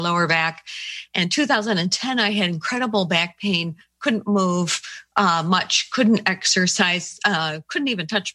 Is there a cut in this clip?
no; 0 cuts

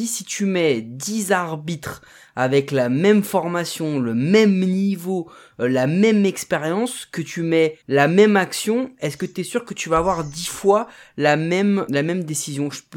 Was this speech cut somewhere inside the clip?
yes; 2 cuts; at 7.8 s, 11.9 s

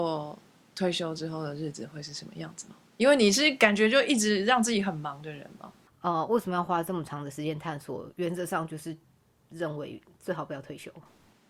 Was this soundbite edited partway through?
no; 0 cuts

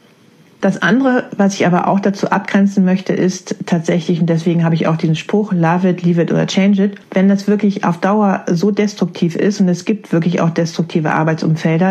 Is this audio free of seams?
yes; 0 cuts

